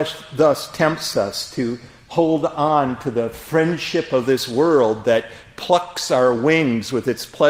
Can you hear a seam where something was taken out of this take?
no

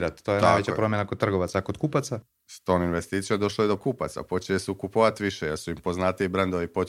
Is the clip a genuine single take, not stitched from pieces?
no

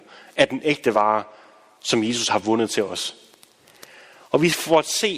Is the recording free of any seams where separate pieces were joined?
yes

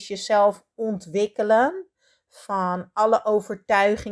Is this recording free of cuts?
yes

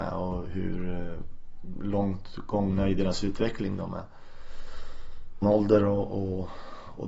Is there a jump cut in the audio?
yes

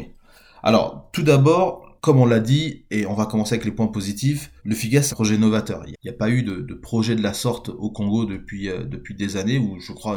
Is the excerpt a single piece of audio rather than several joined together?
no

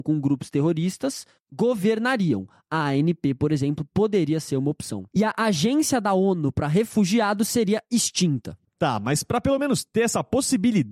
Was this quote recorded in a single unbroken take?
yes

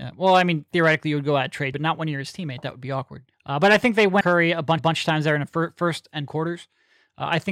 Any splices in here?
yes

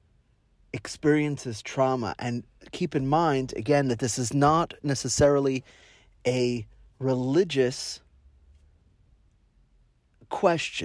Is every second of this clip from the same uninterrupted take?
yes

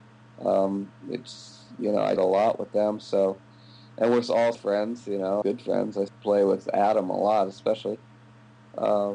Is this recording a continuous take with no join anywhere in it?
no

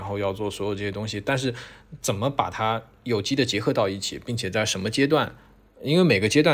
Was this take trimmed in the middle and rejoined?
no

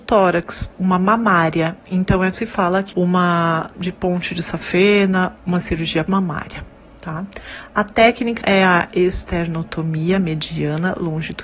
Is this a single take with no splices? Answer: no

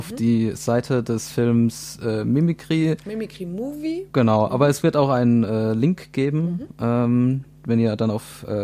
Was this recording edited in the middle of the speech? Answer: yes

